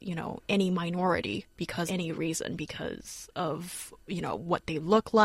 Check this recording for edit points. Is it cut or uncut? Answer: cut